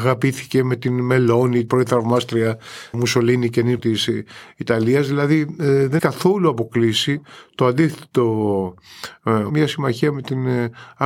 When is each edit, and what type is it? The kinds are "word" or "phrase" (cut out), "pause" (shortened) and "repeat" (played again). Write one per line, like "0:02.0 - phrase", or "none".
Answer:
0:01.7 - word
0:02.9 - word
0:03.8 - word
0:06.0 - word
0:09.5 - word